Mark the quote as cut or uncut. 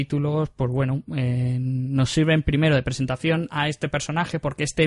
uncut